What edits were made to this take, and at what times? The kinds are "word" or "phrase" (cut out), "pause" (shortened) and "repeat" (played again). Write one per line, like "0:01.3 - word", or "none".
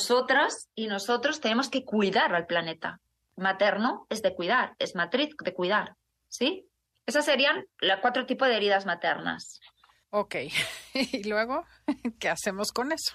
0:07.7 - pause